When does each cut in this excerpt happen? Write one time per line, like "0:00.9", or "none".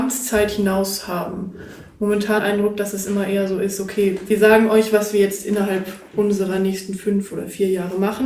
0:02.4